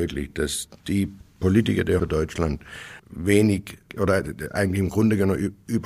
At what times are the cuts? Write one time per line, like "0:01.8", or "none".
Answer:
0:02.0
0:03.0